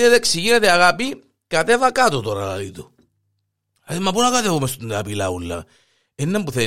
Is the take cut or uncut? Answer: uncut